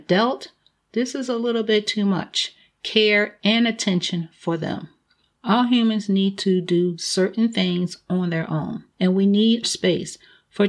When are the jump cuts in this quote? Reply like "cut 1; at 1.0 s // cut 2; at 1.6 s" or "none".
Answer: cut 1; at 8.9 s // cut 2; at 9.6 s